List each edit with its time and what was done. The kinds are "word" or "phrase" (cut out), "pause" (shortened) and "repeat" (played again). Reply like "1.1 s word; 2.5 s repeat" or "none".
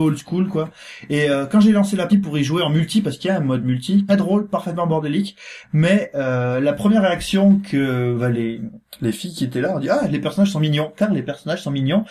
2.1 s word; 4.1 s phrase